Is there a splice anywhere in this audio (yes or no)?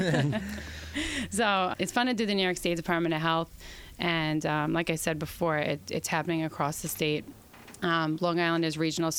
no